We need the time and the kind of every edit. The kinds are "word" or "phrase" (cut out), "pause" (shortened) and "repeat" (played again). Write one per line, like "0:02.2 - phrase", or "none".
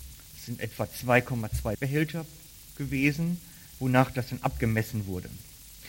0:01.7 - word